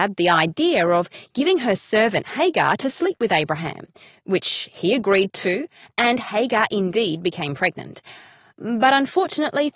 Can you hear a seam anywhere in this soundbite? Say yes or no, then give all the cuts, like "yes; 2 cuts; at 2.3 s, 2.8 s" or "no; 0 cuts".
no; 0 cuts